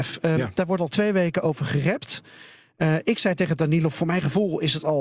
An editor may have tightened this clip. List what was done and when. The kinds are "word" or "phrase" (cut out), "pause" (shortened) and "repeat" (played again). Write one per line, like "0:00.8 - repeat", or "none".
none